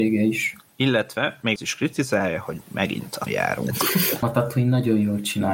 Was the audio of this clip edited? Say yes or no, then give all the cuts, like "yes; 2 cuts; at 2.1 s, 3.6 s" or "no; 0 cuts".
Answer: yes; 3 cuts; at 1.6 s, 3.3 s, 4.2 s